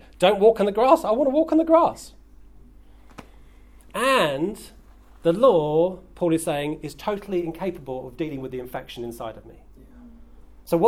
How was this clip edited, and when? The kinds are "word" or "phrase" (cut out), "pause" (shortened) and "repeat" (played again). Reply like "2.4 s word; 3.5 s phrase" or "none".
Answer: none